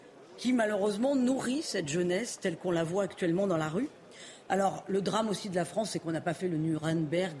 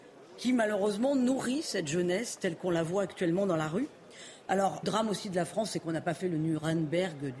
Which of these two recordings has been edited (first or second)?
second